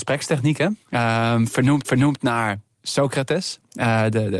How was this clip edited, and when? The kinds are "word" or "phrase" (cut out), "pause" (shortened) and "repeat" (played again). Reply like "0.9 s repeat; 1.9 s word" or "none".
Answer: 1.8 s repeat